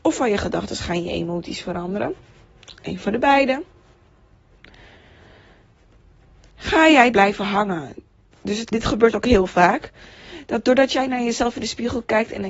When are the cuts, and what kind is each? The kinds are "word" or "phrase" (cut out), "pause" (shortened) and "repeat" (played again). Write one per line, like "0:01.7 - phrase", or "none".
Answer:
0:07.1 - word
0:08.7 - phrase